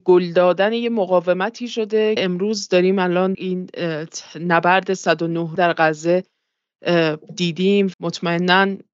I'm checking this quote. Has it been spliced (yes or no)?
yes